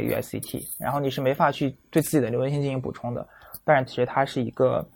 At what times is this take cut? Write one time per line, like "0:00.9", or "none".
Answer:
0:03.9

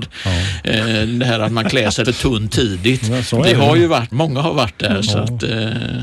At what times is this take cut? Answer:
0:02.0
0:02.5
0:04.1

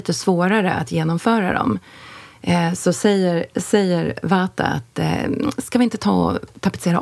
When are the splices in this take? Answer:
none

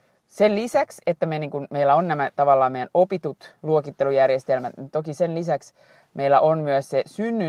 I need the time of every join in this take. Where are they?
0:03.6

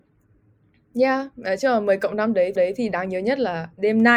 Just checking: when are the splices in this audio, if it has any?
0:02.6

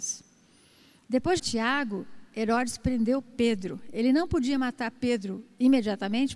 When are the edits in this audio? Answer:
0:01.4

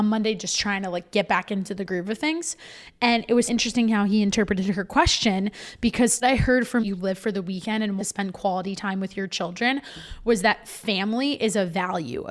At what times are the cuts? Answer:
0:03.5
0:06.2
0:06.8
0:08.0

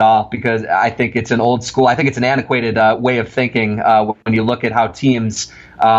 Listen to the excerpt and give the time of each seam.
none

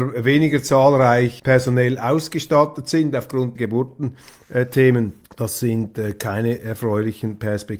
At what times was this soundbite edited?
0:01.4
0:03.5
0:05.2

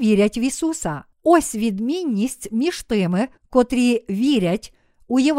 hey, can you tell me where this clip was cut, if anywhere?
0:01.1
0:03.4

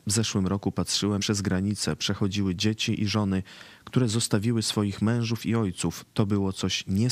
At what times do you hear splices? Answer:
0:01.2

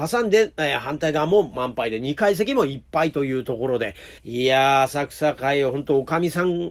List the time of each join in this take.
0:04.2

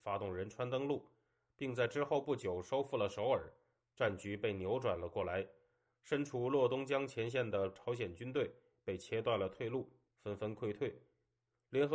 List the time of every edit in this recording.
none

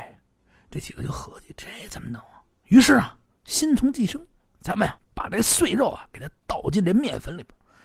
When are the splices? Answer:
0:05.0

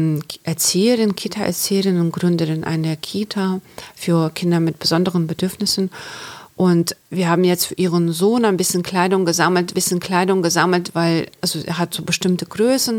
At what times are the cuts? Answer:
0:07.0
0:09.7

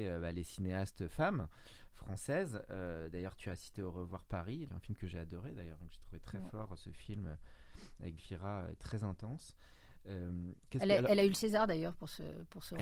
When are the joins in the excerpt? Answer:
0:04.7
0:08.2

